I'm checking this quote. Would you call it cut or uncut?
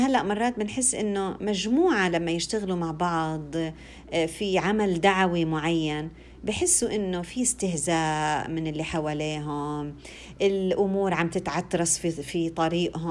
uncut